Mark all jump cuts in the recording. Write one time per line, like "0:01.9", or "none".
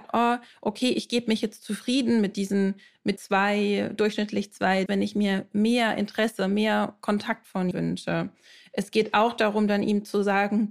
0:03.2
0:04.9
0:07.7